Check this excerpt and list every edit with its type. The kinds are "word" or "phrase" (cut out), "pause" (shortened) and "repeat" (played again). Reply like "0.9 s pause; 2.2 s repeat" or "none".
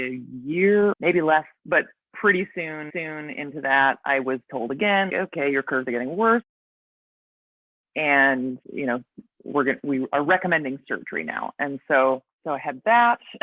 0.9 s phrase; 1.6 s pause; 2.9 s repeat; 5.1 s word; 8.6 s pause; 12.3 s pause